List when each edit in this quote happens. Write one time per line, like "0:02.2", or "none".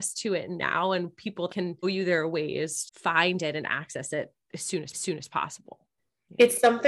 0:01.5
0:01.8
0:02.9
0:04.9